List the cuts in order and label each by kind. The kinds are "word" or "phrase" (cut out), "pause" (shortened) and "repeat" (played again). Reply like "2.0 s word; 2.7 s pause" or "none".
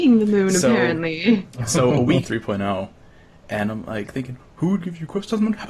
2.2 s phrase